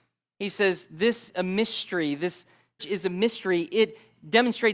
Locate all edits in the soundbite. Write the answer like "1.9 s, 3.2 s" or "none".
1.3 s, 2.8 s